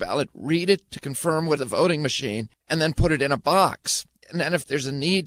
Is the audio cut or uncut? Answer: cut